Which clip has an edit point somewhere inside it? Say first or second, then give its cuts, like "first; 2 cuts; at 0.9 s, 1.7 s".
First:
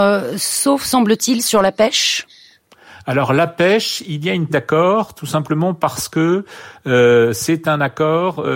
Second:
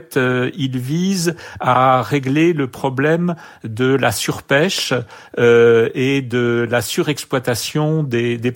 first; 1 cut; at 4.5 s